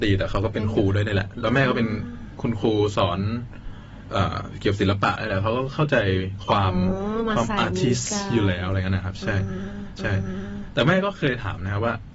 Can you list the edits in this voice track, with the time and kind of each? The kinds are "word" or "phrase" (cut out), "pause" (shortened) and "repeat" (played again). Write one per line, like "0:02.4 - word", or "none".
0:10.0 - repeat